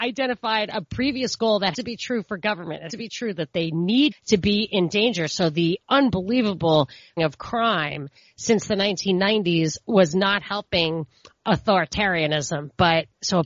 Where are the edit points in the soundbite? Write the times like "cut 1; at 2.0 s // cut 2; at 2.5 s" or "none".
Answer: cut 1; at 1.7 s // cut 2; at 2.9 s // cut 3; at 4.1 s // cut 4; at 7.2 s